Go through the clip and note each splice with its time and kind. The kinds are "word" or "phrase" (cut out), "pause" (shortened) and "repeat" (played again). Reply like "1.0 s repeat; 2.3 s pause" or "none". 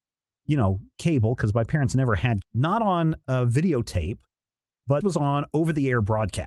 2.4 s word; 5.0 s word